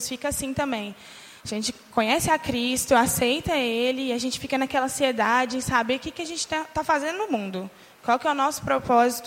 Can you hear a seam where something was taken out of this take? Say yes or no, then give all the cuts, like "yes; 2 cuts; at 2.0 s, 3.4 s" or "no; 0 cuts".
no; 0 cuts